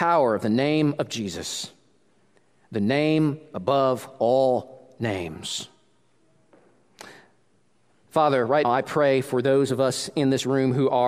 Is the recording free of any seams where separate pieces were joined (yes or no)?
no